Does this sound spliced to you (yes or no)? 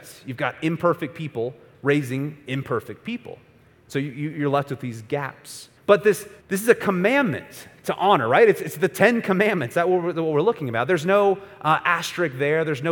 yes